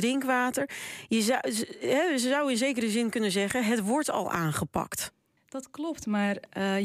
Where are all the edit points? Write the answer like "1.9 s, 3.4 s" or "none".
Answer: 5.4 s